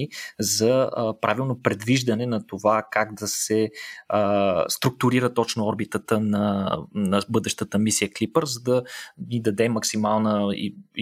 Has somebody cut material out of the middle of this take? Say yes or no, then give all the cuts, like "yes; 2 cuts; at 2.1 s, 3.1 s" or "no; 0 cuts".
no; 0 cuts